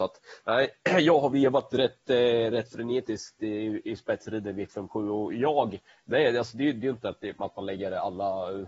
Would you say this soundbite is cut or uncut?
uncut